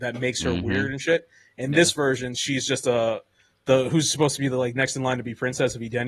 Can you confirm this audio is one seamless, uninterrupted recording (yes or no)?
yes